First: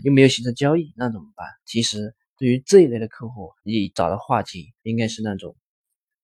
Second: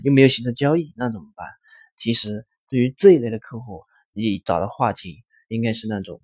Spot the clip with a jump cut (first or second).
first